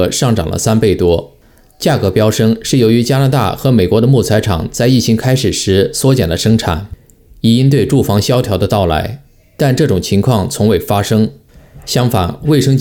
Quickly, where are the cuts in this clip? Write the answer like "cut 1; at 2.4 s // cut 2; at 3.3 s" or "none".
none